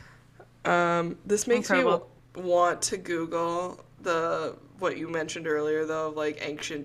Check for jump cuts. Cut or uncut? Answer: cut